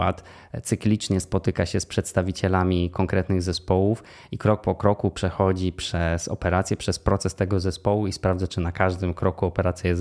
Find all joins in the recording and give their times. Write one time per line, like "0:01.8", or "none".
none